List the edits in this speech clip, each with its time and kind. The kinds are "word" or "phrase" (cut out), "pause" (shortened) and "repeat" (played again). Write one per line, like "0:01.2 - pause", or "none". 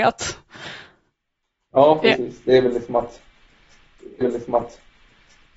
0:04.2 - repeat

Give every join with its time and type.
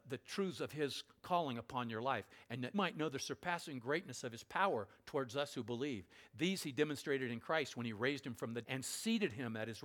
0:02.7 - word
0:08.6 - word

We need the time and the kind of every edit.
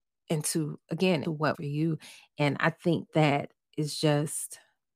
0:01.2 - word
0:01.5 - word
0:03.1 - word

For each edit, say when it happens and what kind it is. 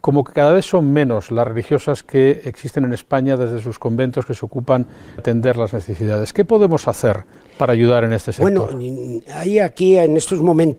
0:05.2 - word

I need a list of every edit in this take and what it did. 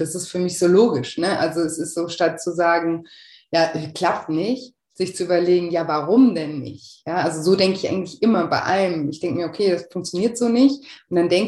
none

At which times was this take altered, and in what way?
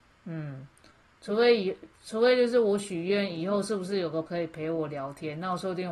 0:04.3 - word

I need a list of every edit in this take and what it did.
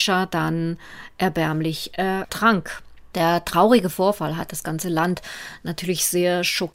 none

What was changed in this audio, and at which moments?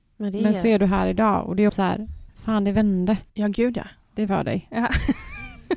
0:01.7 - phrase
0:02.3 - pause
0:03.3 - pause
0:04.3 - word

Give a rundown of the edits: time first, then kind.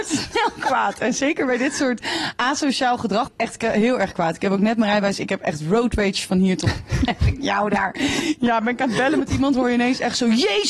0:03.3 - word

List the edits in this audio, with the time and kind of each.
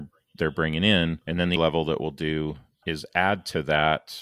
0:01.2 - pause
0:01.6 - word
0:02.8 - word

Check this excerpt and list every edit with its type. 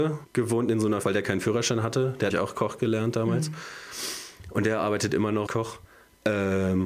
0:01.0 - word
0:02.3 - word
0:05.5 - phrase

